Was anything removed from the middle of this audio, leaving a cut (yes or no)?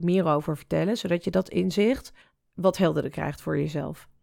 no